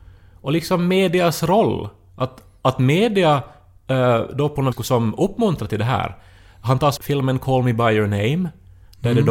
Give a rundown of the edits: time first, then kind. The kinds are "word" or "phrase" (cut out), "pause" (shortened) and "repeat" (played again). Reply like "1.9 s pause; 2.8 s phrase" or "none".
4.7 s word; 7.0 s word

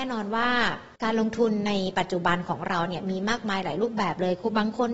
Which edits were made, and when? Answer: 1.0 s pause

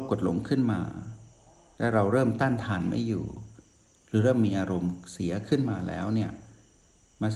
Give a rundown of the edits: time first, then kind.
none

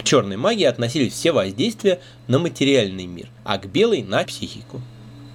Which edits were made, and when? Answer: 3.4 s pause; 4.3 s word

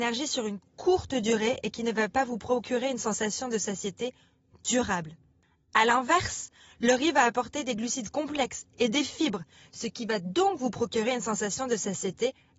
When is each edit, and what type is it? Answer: none

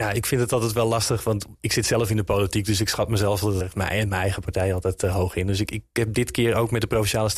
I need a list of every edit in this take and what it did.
3.6 s word

